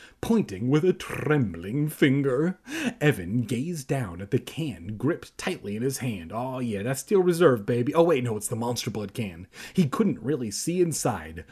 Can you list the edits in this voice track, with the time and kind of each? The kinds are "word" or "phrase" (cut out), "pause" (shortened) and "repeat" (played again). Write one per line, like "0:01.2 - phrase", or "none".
none